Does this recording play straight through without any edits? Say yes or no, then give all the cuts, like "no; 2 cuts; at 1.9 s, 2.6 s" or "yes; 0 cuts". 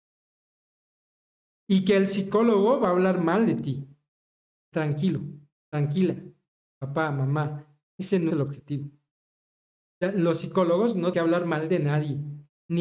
no; 4 cuts; at 4.7 s, 7.9 s, 8.3 s, 11.1 s